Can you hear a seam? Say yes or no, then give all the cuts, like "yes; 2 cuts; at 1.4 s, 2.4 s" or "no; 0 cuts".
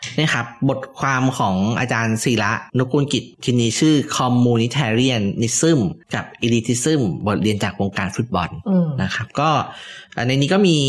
yes; 3 cuts; at 2.7 s, 3.3 s, 6.0 s